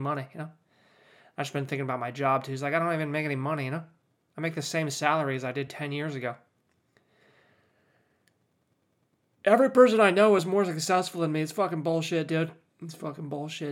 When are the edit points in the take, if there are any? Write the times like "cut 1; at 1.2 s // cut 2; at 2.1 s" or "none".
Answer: none